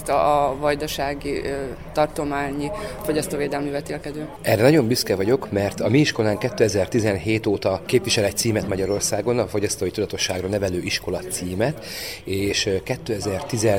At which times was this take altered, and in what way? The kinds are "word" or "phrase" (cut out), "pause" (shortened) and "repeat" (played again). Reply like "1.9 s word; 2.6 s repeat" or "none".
none